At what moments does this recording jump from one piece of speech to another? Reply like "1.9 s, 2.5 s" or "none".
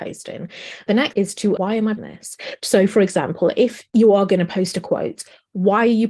1.1 s, 1.6 s, 2.0 s, 3.9 s